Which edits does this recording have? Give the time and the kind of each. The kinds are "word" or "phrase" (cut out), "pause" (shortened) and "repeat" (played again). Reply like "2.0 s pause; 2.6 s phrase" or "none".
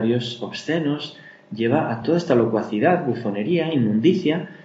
none